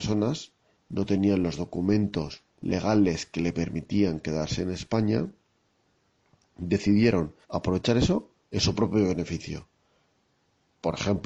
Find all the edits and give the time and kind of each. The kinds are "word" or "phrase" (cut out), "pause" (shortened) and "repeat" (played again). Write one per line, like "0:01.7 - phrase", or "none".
0:02.5 - pause
0:07.4 - pause